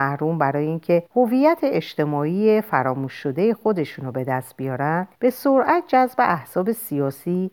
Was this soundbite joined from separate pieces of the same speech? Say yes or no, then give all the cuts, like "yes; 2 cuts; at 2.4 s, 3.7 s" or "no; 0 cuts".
yes; 2 cuts; at 1.1 s, 5.2 s